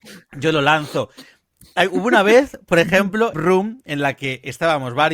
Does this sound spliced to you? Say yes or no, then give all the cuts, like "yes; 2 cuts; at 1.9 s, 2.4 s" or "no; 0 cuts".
yes; 1 cut; at 3.3 s